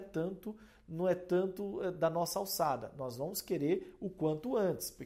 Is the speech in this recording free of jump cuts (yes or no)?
yes